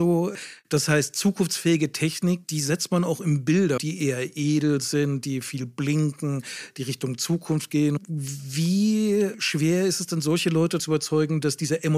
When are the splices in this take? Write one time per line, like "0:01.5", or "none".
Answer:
0:03.8
0:10.8